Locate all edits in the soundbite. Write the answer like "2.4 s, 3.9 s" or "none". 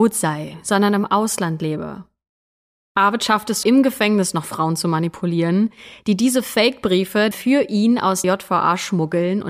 3.6 s, 7.3 s, 8.2 s